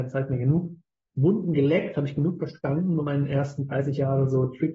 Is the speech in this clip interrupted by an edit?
yes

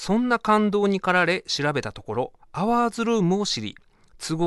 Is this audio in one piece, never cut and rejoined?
no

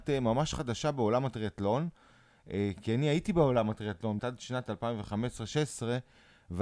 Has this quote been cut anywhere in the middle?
yes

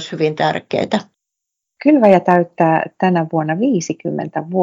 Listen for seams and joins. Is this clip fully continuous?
yes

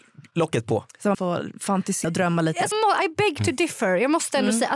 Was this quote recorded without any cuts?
no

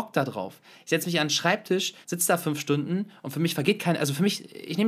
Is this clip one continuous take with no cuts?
no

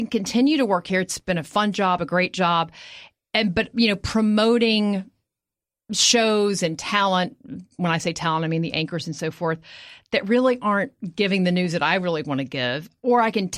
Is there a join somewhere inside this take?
no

